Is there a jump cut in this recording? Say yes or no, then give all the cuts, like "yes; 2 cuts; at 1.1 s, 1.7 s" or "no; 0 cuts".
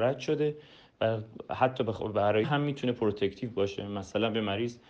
yes; 1 cut; at 2.4 s